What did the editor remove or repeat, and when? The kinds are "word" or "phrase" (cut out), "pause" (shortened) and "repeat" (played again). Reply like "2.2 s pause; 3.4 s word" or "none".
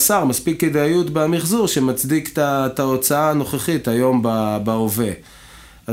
none